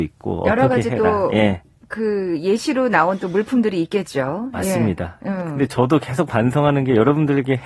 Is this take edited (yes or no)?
no